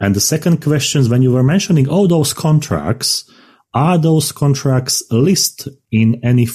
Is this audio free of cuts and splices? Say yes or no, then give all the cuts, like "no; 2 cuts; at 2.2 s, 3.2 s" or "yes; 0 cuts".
yes; 0 cuts